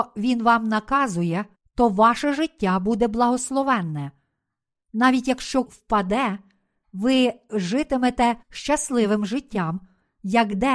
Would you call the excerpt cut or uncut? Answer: cut